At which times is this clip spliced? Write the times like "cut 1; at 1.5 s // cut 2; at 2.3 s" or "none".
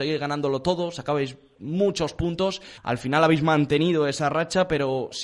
cut 1; at 2.8 s